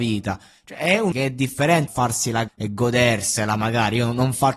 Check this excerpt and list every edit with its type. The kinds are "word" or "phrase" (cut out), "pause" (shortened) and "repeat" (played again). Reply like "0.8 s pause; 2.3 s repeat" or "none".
1.1 s word; 1.9 s word; 2.5 s word